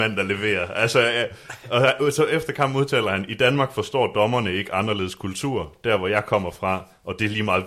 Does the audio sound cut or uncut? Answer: uncut